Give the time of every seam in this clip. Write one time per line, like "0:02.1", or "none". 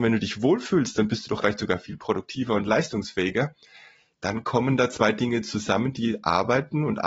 0:01.4